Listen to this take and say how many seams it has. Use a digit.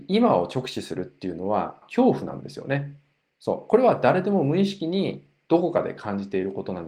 1